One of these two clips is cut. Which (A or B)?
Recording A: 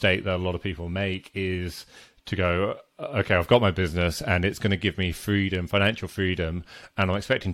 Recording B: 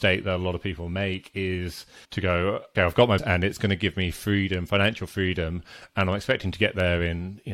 B